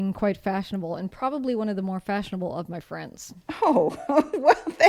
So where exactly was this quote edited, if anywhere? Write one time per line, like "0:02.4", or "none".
none